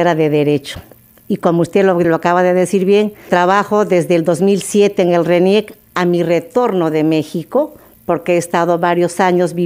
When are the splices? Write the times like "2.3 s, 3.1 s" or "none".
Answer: 2.0 s, 3.3 s